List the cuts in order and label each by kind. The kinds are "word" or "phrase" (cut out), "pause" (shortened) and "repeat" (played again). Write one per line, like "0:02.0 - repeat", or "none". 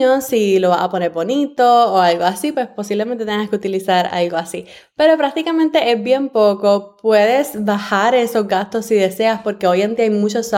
none